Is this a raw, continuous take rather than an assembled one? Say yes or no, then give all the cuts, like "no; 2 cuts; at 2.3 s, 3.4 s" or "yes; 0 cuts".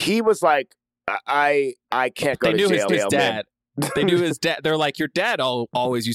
no; 1 cut; at 2.9 s